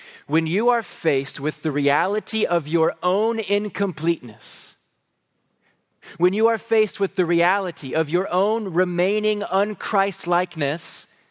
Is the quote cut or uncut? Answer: uncut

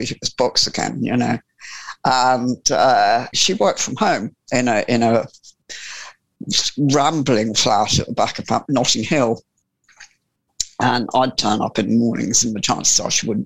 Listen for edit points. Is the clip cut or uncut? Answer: cut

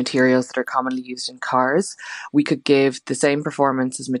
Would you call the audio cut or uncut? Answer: uncut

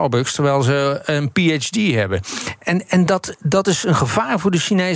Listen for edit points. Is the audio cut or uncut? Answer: uncut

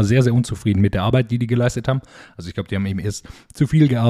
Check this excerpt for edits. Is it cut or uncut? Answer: uncut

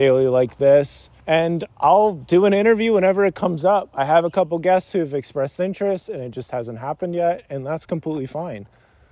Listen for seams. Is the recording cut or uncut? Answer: cut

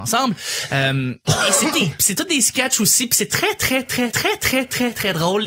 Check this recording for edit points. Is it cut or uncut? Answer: cut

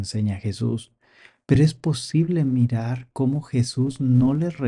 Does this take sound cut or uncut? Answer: uncut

